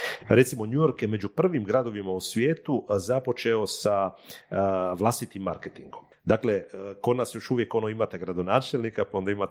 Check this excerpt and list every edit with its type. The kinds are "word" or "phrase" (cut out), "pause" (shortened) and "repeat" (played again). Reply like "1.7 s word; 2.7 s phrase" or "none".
none